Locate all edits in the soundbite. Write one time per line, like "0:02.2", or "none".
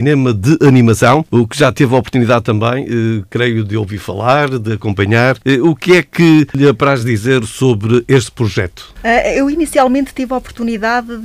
none